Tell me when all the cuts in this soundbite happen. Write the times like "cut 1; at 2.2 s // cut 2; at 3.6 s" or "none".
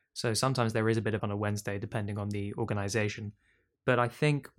cut 1; at 1.2 s